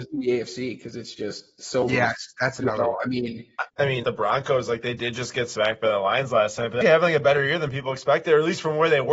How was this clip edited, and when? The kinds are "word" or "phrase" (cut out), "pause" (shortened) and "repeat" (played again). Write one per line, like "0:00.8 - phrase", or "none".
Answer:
0:03.7 - pause
0:04.0 - phrase
0:06.8 - word